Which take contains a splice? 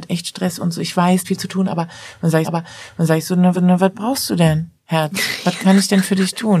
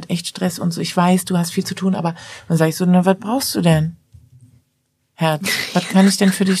first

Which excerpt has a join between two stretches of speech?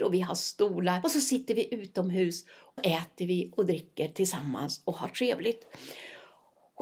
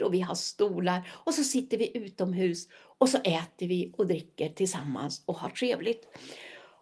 first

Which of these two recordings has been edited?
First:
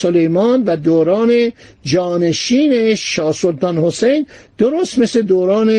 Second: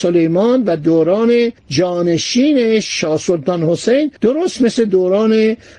second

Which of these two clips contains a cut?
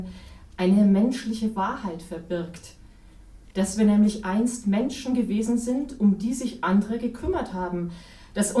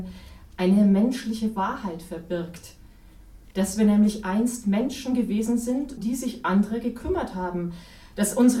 second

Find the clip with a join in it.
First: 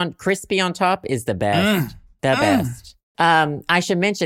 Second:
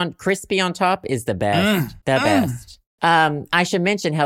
second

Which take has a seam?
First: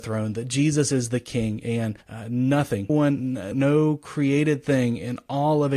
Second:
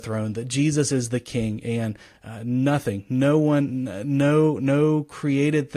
first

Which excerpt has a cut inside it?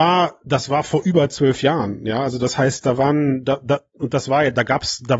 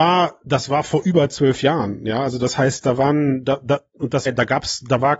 second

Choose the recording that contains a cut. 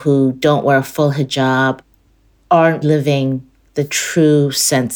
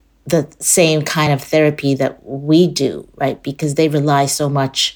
first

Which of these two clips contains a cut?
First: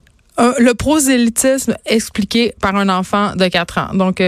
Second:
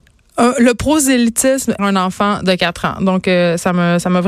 second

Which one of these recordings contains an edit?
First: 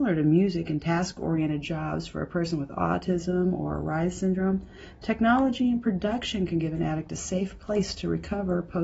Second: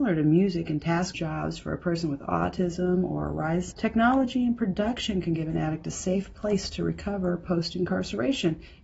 second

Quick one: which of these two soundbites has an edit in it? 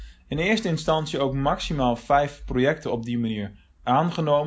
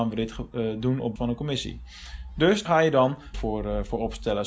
second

